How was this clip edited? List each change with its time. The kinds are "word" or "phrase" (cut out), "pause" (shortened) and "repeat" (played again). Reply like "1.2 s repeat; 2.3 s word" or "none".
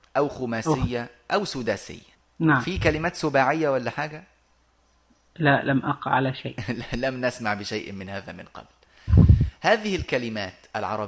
2.1 s pause